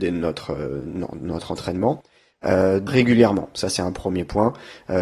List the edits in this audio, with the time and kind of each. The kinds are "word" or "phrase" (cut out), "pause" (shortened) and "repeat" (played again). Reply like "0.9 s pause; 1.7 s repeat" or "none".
2.9 s word

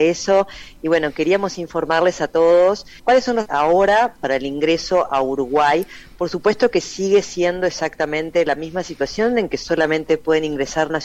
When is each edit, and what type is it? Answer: 3.0 s word; 3.5 s word

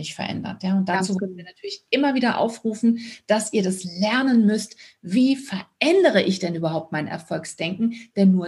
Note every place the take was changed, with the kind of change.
none

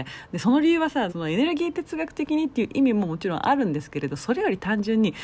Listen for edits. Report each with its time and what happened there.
1.1 s word

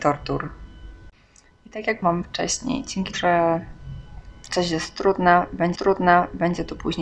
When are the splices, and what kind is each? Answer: 2.0 s word; 3.1 s word; 5.8 s repeat

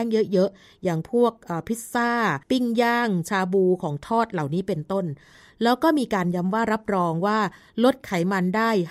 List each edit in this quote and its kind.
2.4 s pause

